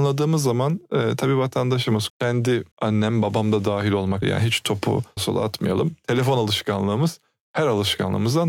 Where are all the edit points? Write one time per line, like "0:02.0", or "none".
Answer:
0:02.1
0:02.7
0:04.2
0:05.2